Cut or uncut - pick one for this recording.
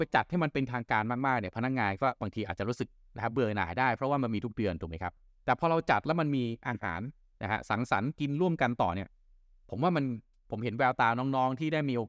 uncut